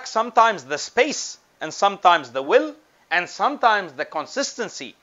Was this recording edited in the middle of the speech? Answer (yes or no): no